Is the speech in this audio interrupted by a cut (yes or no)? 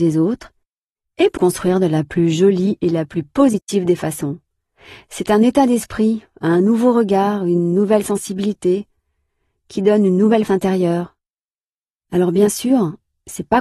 yes